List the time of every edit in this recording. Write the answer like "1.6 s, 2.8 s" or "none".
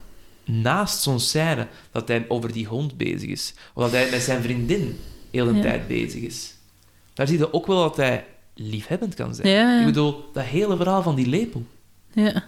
none